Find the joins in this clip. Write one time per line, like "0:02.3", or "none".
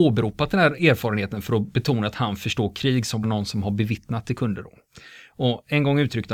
0:03.2